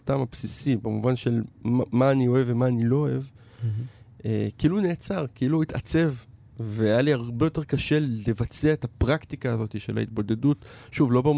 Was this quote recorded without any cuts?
yes; 0 cuts

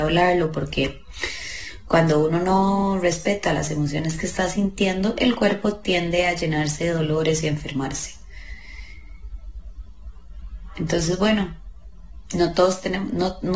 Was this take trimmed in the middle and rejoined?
no; 0 cuts

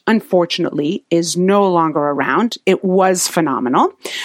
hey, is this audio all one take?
yes; 0 cuts

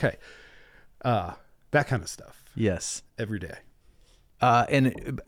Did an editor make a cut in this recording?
no; 0 cuts

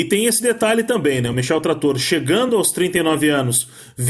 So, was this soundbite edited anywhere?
no; 0 cuts

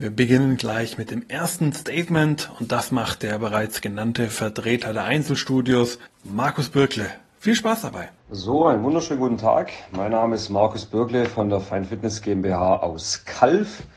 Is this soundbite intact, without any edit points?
no; 2 cuts; at 6.1 s, 8.2 s

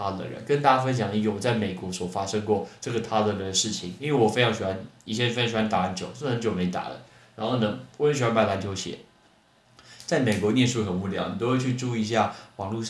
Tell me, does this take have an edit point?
no; 0 cuts

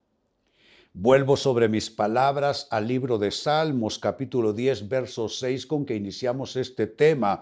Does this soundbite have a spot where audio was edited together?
no; 0 cuts

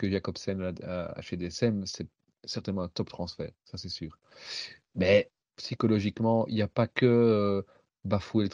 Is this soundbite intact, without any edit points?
yes; 0 cuts

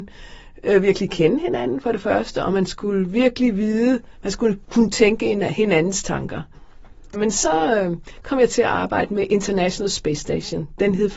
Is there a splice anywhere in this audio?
no; 0 cuts

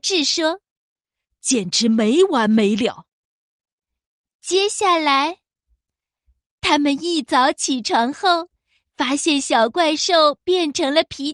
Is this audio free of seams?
yes; 0 cuts

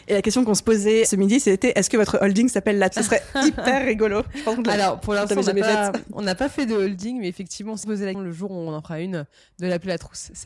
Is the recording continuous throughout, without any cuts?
no; 3 cuts; at 2.9 s, 7.8 s, 8.1 s

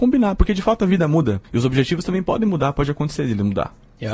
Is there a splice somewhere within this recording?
yes; 1 cut; at 1.4 s

